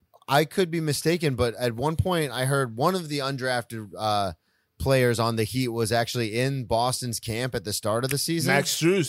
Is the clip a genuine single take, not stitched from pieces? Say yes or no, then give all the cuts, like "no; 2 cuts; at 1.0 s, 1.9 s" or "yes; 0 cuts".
yes; 0 cuts